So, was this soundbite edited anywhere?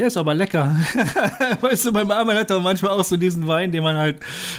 no; 0 cuts

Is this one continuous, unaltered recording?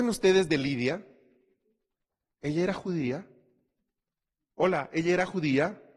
yes; 0 cuts

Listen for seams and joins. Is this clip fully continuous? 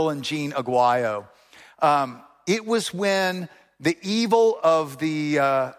no; 1 cut; at 4.6 s

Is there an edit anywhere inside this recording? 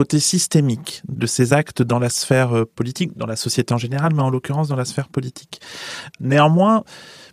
no; 0 cuts

